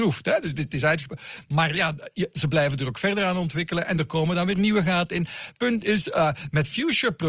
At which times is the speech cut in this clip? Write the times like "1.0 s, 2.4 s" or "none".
none